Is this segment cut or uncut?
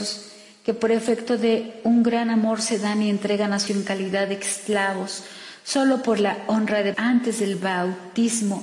cut